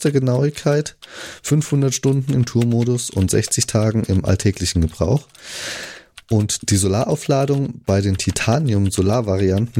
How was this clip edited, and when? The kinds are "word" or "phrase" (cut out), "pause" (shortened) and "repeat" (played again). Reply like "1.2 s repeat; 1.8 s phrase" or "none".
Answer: none